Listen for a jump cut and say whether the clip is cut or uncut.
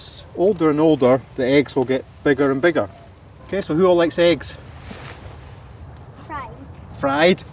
uncut